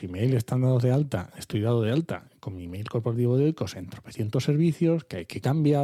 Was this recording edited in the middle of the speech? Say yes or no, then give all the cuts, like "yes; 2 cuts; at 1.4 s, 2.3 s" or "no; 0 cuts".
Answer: no; 0 cuts